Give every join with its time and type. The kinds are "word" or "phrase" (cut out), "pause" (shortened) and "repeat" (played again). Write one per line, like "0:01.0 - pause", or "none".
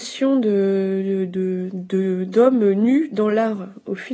none

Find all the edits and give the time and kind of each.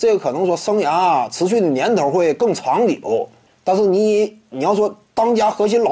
0:03.5 - pause

